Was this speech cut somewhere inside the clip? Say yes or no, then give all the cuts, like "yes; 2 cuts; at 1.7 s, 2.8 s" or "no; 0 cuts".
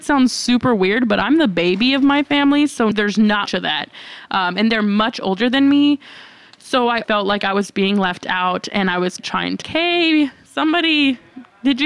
yes; 5 cuts; at 2.9 s, 3.5 s, 7.0 s, 9.2 s, 9.6 s